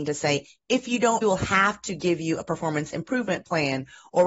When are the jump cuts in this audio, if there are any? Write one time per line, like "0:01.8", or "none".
0:01.2